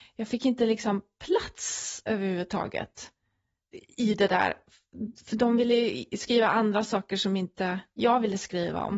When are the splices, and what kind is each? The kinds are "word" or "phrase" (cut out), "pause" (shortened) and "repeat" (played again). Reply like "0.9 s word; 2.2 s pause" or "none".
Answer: none